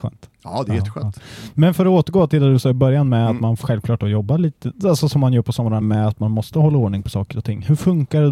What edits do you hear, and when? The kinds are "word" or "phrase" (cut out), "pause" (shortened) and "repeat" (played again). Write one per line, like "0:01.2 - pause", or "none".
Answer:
0:03.6 - word
0:05.8 - word